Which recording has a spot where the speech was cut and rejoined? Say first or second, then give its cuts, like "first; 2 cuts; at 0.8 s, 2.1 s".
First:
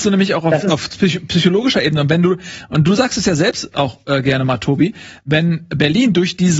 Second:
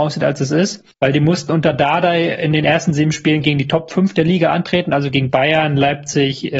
second; 1 cut; at 0.9 s